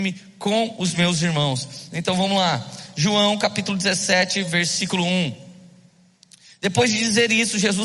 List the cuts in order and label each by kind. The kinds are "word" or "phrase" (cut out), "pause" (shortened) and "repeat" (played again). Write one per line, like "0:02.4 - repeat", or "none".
none